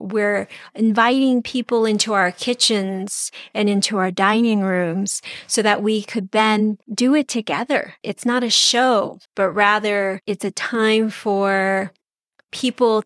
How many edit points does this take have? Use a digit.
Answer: 4